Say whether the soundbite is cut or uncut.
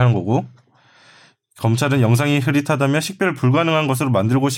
uncut